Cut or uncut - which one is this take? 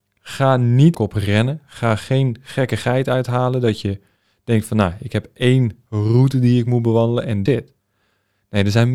cut